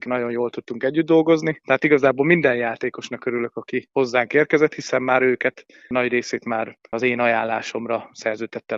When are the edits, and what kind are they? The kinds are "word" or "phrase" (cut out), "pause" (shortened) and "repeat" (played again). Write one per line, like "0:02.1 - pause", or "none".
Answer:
none

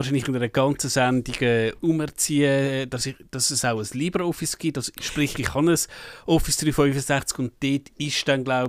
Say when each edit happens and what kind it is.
0:01.8 - word

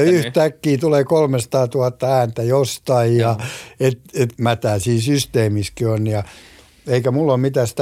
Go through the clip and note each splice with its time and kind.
0:04.3 - phrase

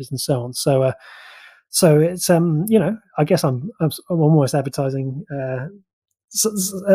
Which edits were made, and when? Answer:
none

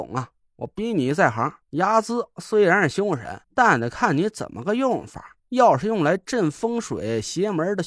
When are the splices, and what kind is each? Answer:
0:01.6 - pause
0:03.4 - pause
0:05.4 - pause

